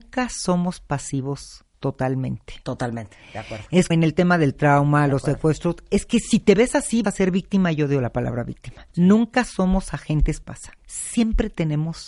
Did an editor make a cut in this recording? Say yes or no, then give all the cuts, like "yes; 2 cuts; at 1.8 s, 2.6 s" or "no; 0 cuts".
yes; 6 cuts; at 1.7 s, 3.9 s, 7.0 s, 8.9 s, 10.4 s, 10.8 s